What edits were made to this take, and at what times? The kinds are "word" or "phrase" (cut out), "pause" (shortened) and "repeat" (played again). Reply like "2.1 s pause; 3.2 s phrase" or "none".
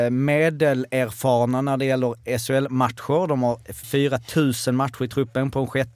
3.8 s word